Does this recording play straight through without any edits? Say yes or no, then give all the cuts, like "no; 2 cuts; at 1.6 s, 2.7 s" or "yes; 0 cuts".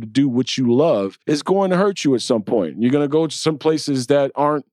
no; 1 cut; at 1.2 s